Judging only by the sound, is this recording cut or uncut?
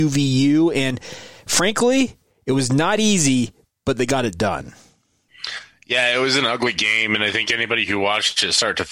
uncut